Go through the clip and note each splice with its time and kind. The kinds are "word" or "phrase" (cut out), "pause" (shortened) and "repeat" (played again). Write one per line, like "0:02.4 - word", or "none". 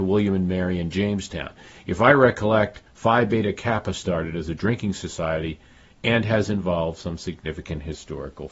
none